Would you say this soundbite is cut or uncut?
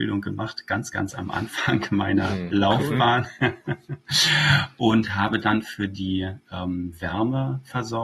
uncut